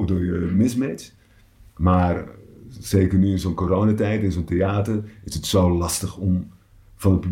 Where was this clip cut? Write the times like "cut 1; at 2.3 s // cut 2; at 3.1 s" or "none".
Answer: none